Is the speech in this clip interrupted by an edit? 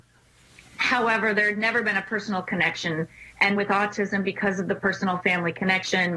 yes; 1 cut; at 3.6 s

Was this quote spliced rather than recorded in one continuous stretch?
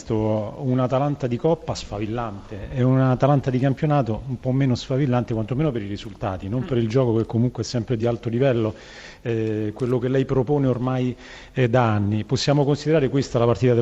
no; 0 cuts

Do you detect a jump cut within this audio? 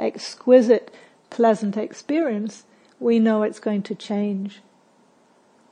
no; 0 cuts

